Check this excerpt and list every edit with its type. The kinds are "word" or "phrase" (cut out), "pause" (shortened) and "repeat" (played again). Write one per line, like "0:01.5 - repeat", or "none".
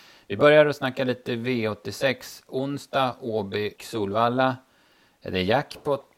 0:03.8 - word